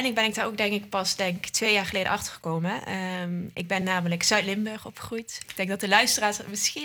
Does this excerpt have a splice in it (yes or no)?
no